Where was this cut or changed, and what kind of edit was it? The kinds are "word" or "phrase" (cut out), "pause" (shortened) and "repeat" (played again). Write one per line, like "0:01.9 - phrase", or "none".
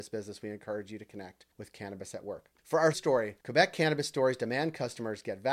0:01.5 - pause
0:02.6 - pause
0:02.9 - word
0:03.4 - pause